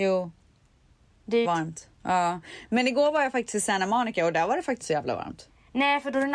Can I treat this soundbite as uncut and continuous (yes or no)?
no